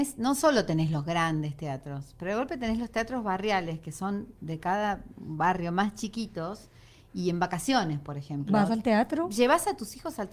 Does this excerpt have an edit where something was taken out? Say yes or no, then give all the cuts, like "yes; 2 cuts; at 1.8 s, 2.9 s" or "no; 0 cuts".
no; 0 cuts